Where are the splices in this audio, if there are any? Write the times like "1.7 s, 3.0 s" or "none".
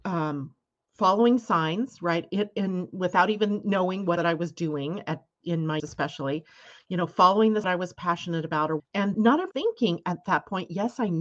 4.2 s, 5.8 s, 7.6 s, 8.8 s, 9.1 s, 9.5 s

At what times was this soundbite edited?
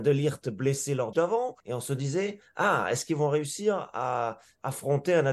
1.1 s, 1.6 s

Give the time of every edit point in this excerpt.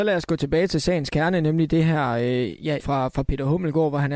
2.8 s

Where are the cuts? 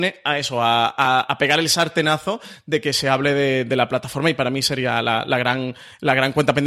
none

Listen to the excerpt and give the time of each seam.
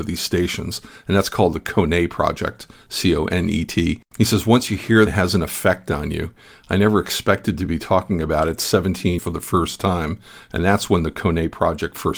4.0 s, 5.1 s, 9.2 s

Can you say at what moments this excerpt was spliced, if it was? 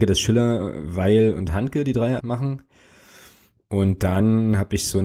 2.2 s

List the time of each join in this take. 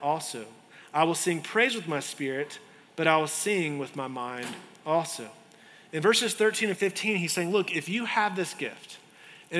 none

